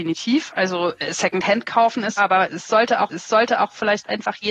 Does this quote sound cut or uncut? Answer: cut